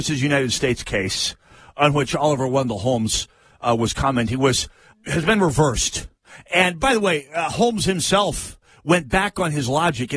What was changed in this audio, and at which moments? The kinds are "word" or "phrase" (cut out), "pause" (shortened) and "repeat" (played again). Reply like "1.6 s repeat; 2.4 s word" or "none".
4.9 s word